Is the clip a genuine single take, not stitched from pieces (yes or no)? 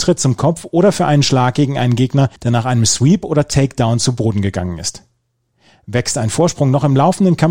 no